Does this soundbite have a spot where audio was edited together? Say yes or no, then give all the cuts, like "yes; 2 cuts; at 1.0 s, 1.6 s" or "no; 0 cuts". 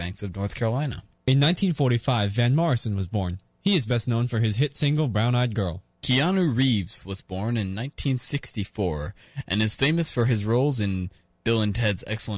no; 0 cuts